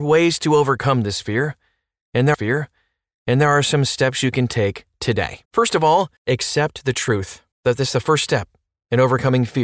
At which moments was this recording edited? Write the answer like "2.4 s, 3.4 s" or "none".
2.3 s, 5.4 s, 6.2 s, 7.5 s